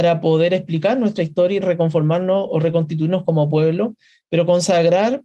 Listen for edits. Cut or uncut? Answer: cut